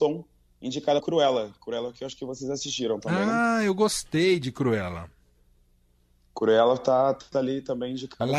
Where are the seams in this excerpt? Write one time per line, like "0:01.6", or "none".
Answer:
0:01.0